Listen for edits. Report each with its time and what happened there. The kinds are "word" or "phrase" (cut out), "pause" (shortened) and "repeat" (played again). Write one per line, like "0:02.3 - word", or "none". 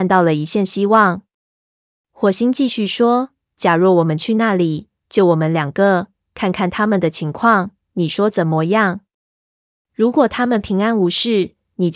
none